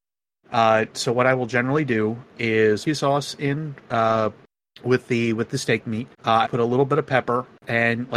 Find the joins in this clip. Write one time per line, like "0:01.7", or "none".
0:02.9
0:04.5
0:06.1
0:06.4